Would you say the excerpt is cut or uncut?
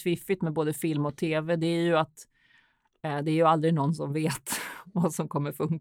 uncut